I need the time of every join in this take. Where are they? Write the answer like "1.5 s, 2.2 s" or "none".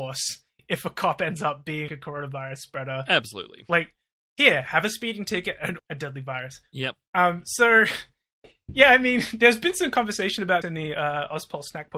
1.9 s, 5.8 s, 10.6 s